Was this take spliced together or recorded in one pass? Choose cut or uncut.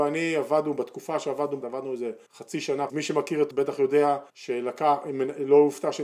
cut